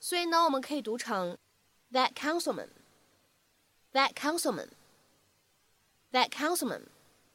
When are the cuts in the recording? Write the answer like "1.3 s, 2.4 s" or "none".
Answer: none